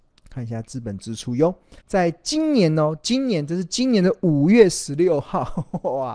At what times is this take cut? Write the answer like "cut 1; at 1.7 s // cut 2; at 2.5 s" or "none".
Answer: cut 1; at 1.8 s